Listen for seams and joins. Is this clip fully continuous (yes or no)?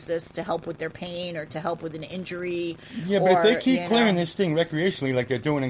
yes